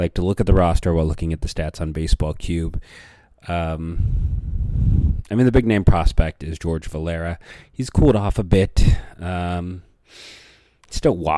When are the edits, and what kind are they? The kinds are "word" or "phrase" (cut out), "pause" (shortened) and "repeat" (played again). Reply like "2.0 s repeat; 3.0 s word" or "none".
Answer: none